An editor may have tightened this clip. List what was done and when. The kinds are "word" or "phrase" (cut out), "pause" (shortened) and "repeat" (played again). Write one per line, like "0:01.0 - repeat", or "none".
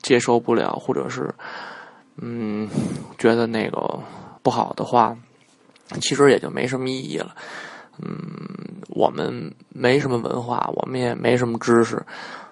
0:04.4 - pause